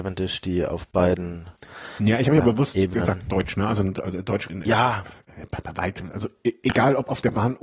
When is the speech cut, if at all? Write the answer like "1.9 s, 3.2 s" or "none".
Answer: 4.5 s